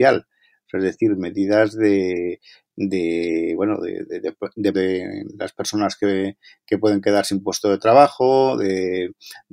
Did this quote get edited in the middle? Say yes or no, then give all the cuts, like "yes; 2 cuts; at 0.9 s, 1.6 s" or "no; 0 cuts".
yes; 1 cut; at 4.7 s